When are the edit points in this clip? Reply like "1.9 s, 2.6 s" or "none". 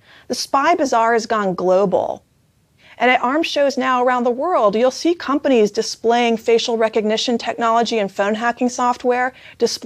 none